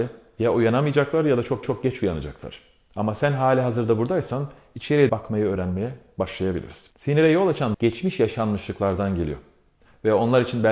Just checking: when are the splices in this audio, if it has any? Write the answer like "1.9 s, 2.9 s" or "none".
1.6 s, 5.1 s, 7.7 s